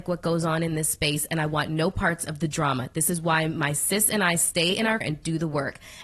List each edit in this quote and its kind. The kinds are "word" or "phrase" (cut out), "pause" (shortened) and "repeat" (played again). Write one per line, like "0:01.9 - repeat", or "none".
0:05.0 - word